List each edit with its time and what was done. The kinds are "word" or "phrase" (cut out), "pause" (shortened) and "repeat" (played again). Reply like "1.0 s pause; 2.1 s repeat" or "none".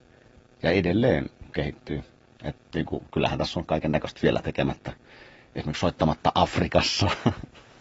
none